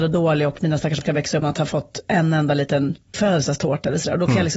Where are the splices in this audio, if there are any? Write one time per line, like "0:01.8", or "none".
0:01.0
0:01.4
0:03.1